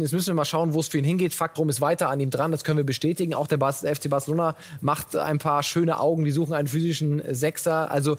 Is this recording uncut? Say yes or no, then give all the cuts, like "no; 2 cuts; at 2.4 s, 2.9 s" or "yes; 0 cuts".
no; 1 cut; at 1.6 s